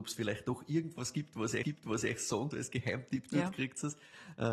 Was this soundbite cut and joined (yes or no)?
yes